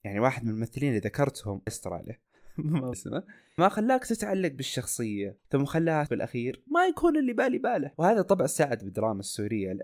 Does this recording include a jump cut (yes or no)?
yes